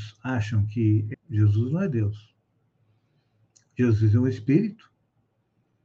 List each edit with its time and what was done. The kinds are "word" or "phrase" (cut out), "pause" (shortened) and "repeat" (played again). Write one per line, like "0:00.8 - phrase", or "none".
0:01.1 - word